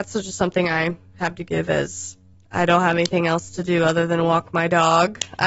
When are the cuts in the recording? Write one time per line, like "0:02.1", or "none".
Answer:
0:02.3